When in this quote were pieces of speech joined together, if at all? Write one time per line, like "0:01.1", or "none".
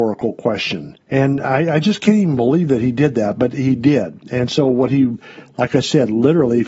0:01.0